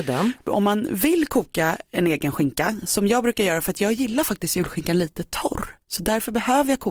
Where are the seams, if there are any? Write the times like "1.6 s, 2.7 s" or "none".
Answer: 5.8 s